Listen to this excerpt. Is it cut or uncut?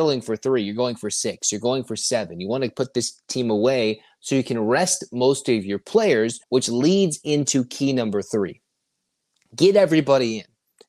cut